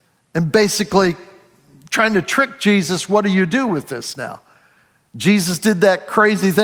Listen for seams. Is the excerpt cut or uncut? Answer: uncut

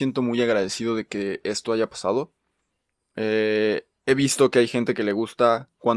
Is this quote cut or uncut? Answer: uncut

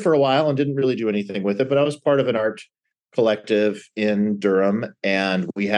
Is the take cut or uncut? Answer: uncut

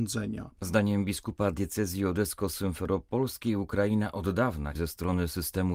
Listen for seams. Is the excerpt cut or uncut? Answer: cut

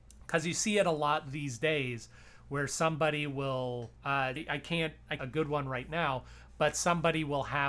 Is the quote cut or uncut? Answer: cut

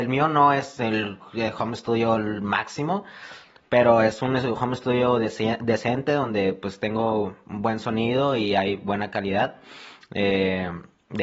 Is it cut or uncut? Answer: uncut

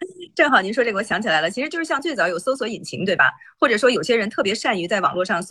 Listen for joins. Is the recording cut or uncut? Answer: uncut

